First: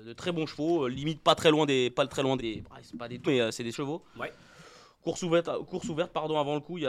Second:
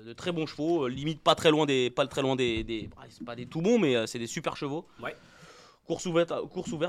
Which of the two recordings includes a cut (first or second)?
first